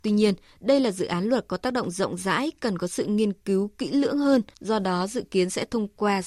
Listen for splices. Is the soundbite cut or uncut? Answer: cut